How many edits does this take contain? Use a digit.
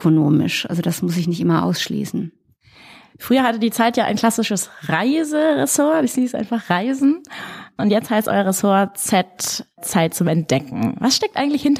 0